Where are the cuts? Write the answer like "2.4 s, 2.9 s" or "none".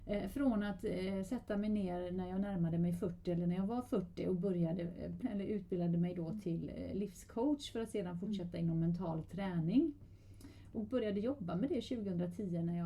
5.2 s